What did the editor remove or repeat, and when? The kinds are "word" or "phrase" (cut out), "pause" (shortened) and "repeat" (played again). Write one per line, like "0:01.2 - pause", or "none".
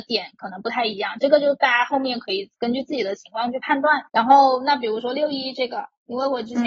0:04.1 - pause